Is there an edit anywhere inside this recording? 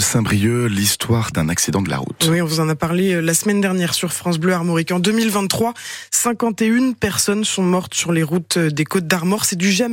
yes; 1 cut; at 1.3 s

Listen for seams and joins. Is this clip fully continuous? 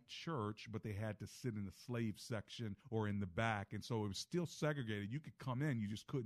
no; 1 cut; at 2.8 s

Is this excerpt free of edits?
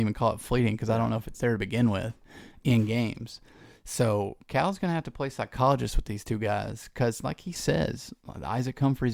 no; 1 cut; at 7.6 s

